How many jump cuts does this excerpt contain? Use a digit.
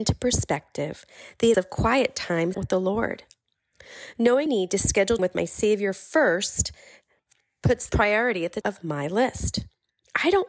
6